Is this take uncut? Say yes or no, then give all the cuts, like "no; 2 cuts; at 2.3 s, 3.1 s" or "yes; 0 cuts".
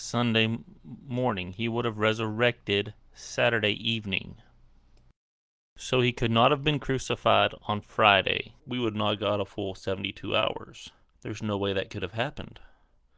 no; 3 cuts; at 4.9 s, 8.6 s, 11.1 s